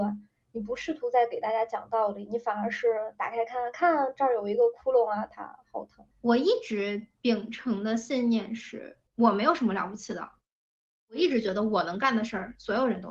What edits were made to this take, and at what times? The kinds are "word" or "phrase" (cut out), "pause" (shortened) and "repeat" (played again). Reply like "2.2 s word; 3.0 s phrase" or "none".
6.1 s pause; 9.1 s pause